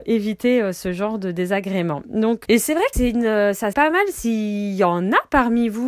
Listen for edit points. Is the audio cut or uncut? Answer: cut